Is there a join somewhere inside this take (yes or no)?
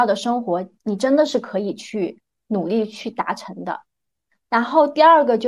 no